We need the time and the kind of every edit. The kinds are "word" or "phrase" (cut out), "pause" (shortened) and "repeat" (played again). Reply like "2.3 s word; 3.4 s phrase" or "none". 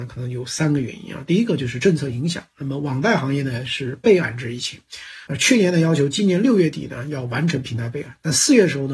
5.3 s pause